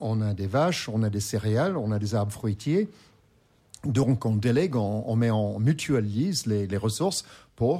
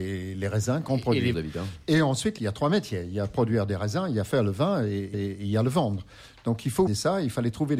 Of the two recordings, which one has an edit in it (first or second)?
second